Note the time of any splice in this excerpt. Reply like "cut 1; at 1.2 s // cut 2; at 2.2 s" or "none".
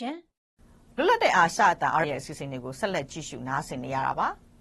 cut 1; at 2.0 s

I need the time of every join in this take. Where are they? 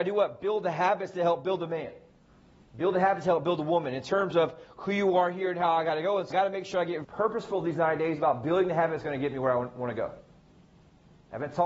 cut 1; at 6.3 s // cut 2; at 7.0 s

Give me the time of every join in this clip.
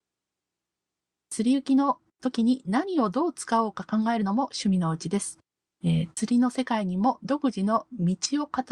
cut 1; at 6.1 s

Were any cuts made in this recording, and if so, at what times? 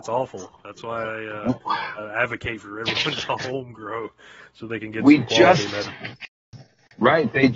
none

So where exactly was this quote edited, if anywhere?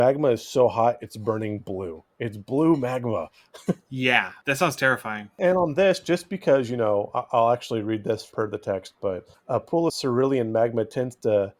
none

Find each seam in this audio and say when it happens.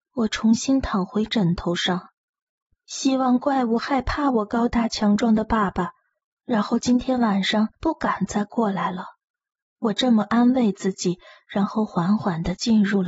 cut 1; at 7.7 s

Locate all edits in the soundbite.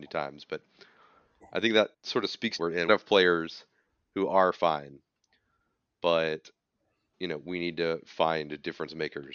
cut 1; at 1.9 s // cut 2; at 2.6 s // cut 3; at 2.9 s // cut 4; at 7.1 s

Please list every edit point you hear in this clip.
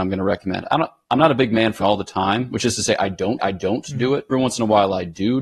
cut 1; at 1.8 s // cut 2; at 3.4 s // cut 3; at 4.3 s

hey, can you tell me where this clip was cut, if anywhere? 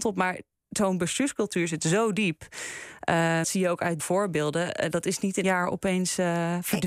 cut 1; at 3.4 s // cut 2; at 4.0 s // cut 3; at 5.4 s

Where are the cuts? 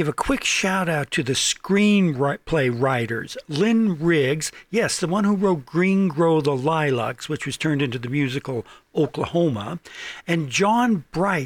none

